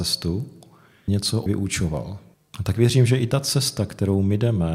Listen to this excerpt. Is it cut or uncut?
cut